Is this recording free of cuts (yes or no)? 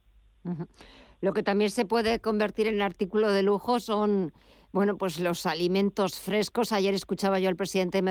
yes